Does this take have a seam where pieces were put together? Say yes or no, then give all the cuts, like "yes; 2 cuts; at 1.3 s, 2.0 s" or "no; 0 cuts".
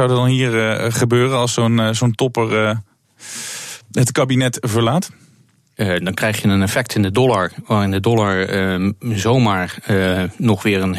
no; 0 cuts